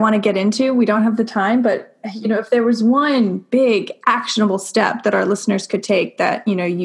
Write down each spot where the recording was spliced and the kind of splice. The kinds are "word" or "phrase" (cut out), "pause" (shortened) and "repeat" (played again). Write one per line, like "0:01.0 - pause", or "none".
none